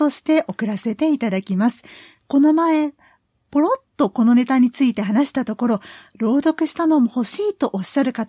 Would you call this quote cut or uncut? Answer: uncut